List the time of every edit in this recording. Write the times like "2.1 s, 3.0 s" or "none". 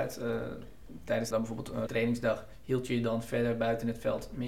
1.3 s, 1.9 s